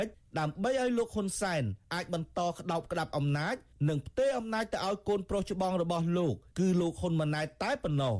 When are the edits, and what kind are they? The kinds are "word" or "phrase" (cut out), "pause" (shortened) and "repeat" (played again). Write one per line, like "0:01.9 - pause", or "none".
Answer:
none